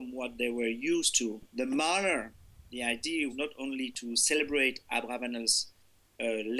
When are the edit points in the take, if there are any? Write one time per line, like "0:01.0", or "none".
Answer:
0:01.5
0:03.3